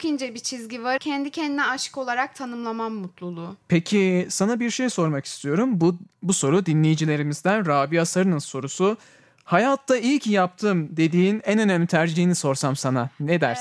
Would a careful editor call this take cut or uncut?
cut